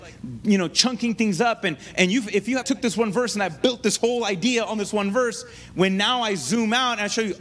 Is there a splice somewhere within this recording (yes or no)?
yes